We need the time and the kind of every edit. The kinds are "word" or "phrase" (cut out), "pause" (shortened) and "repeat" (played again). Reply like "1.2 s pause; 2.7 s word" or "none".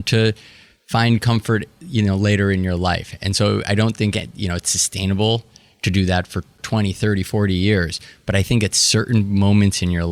none